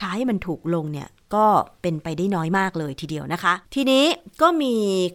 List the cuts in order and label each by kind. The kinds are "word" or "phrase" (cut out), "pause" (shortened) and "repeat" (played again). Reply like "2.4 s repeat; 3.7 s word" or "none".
3.6 s pause